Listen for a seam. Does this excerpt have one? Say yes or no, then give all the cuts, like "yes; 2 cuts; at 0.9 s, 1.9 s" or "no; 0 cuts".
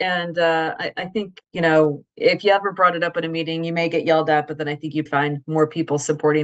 yes; 2 cuts; at 1.4 s, 5.1 s